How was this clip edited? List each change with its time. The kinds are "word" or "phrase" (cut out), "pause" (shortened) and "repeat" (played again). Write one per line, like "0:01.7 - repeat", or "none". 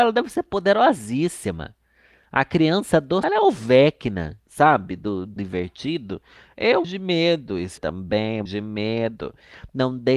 0:03.2 - word
0:05.4 - word
0:06.8 - word
0:07.8 - word
0:08.5 - word